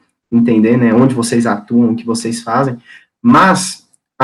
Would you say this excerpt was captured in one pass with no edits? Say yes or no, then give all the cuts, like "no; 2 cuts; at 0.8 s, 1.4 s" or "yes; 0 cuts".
yes; 0 cuts